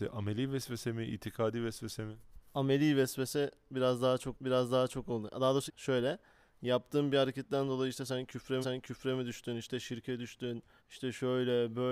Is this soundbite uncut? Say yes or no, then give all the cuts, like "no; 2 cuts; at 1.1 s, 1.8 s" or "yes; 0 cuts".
no; 4 cuts; at 4.3 s, 5.7 s, 8.6 s, 10.8 s